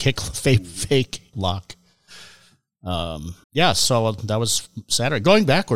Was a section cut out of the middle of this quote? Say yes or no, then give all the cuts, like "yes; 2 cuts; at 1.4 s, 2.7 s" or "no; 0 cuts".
yes; 2 cuts; at 1.3 s, 3.4 s